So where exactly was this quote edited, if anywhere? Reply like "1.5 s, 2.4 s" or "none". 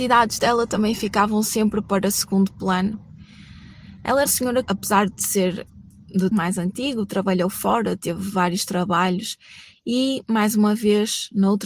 4.3 s, 4.7 s, 6.3 s